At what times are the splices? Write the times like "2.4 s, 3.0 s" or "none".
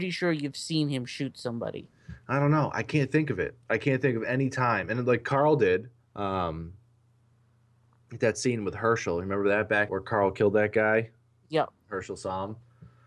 3.6 s, 6.0 s, 9.9 s